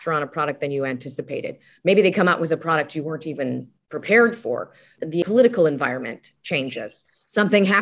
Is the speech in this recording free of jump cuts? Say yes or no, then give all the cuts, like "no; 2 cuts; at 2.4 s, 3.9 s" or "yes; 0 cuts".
yes; 0 cuts